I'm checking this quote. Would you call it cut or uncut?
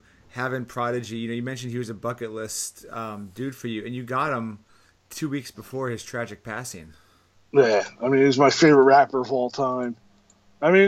uncut